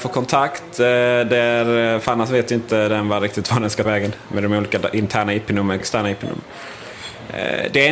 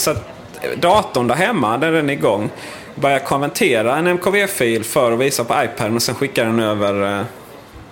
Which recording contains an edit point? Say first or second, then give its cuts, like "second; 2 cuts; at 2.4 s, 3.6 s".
first; 2 cuts; at 3.8 s, 5.8 s